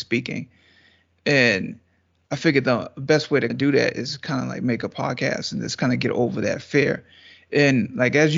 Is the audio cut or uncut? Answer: cut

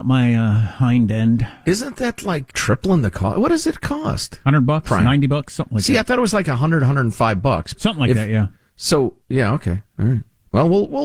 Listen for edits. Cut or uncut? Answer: cut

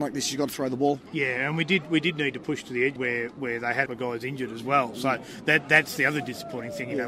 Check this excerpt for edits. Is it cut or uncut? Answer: cut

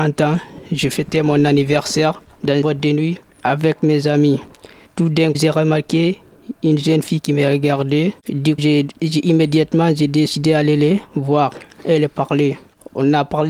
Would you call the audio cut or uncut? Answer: cut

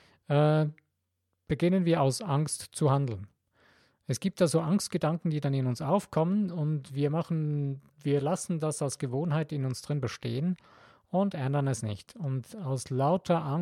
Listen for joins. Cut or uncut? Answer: uncut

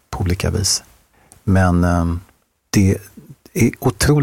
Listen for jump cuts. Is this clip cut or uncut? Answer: uncut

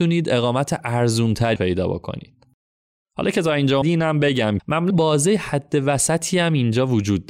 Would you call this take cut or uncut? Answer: cut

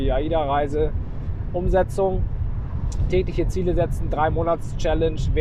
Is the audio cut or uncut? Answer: uncut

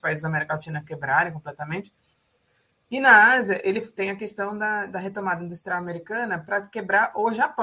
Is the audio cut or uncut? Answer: uncut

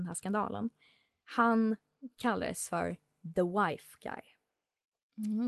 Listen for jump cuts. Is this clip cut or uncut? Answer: uncut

